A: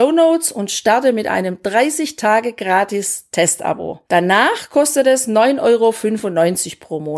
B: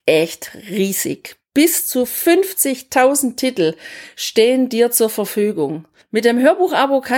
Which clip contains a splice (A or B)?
A